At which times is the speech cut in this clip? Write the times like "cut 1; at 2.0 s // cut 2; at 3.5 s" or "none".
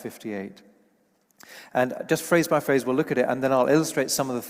none